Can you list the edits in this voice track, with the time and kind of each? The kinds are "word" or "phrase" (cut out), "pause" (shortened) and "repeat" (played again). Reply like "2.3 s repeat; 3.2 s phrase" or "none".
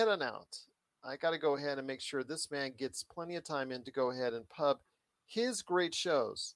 none